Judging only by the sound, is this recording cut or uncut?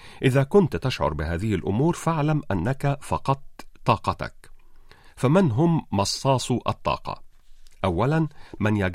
uncut